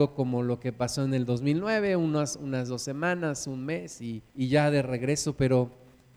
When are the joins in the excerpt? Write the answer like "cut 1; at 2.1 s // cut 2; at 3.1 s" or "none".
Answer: cut 1; at 4.3 s